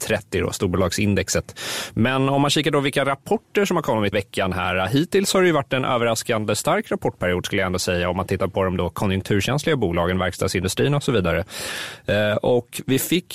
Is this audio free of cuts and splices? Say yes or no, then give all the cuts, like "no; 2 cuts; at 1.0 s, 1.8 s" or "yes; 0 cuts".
no; 1 cut; at 4.1 s